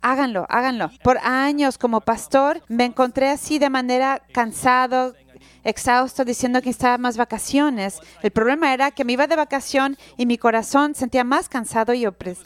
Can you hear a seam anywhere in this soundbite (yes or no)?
yes